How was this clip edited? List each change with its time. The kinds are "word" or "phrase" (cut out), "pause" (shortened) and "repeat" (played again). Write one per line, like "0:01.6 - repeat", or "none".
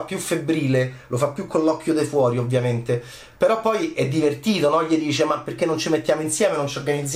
none